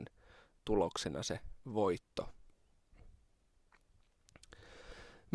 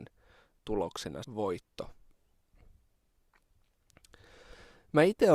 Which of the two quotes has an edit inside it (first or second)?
second